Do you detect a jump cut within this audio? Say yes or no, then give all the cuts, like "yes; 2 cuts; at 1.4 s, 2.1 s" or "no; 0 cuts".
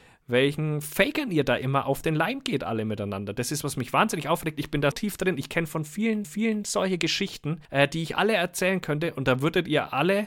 yes; 4 cuts; at 3.6 s, 4.9 s, 6.2 s, 7.7 s